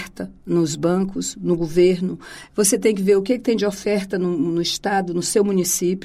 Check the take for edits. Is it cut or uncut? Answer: uncut